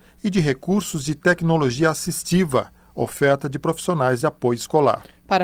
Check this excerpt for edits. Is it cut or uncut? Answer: uncut